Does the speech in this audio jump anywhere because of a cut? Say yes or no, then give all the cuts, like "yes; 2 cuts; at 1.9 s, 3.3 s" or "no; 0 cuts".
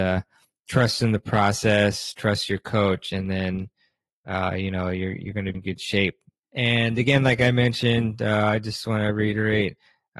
yes; 1 cut; at 5.5 s